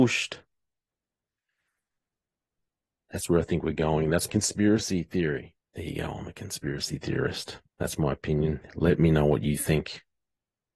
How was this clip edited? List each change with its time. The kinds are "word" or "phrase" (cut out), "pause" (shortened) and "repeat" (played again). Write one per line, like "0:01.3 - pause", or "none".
0:04.3 - word
0:05.6 - pause
0:07.7 - pause